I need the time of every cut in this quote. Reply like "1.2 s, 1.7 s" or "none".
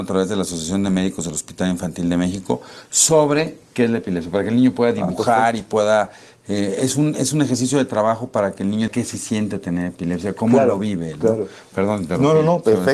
8.9 s